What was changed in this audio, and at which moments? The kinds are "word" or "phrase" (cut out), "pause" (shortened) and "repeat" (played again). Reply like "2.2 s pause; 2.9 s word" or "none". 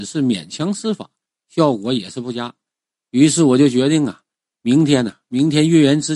none